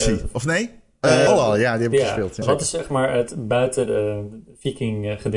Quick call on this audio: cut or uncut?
cut